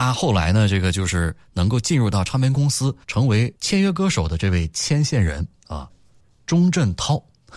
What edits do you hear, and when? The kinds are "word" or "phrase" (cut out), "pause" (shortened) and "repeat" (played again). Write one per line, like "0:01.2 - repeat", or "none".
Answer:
0:03.0 - pause
0:05.9 - phrase